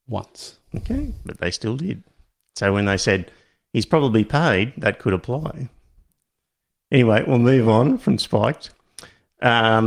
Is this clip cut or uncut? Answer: uncut